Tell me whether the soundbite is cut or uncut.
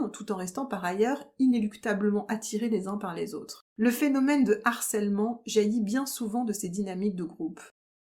cut